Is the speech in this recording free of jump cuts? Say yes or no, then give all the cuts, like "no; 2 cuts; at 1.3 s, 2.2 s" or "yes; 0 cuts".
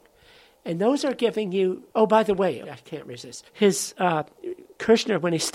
no; 3 cuts; at 1.9 s, 2.6 s, 3.5 s